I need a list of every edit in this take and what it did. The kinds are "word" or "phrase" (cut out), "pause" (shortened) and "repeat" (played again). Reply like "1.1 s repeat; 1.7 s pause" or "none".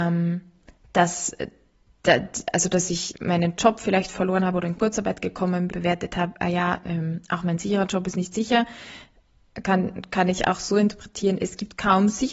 5.7 s phrase